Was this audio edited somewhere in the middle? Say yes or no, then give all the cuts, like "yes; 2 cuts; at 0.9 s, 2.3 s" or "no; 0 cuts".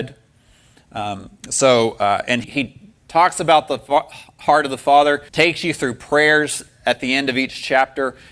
yes; 3 cuts; at 2.4 s, 3.0 s, 5.3 s